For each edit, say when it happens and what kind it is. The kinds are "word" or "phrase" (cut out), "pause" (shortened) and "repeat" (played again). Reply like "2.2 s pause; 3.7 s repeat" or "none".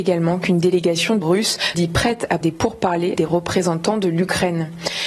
1.2 s word; 1.7 s word; 2.4 s word; 3.2 s word